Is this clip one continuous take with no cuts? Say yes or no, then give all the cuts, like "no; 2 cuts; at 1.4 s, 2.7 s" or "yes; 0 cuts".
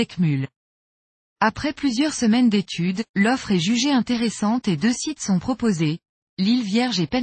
no; 1 cut; at 3.1 s